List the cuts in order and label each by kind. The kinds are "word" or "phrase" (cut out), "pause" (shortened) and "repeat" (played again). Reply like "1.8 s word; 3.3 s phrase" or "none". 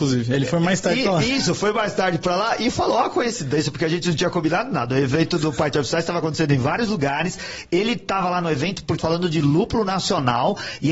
9.0 s word